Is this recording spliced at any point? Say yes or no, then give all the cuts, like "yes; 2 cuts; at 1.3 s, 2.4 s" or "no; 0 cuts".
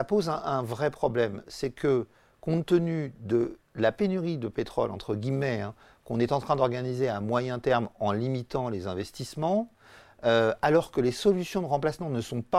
no; 0 cuts